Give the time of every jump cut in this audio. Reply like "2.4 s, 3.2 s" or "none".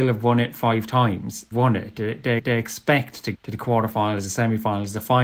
1.5 s, 2.4 s, 3.3 s

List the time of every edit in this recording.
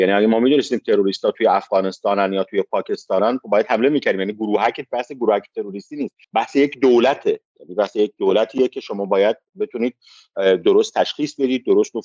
6.2 s

